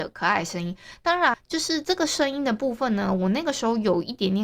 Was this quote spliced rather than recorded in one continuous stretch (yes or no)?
yes